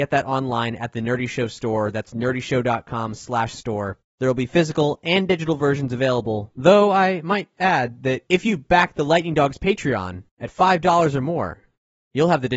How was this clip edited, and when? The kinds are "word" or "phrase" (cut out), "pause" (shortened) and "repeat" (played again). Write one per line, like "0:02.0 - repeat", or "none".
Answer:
0:10.3 - pause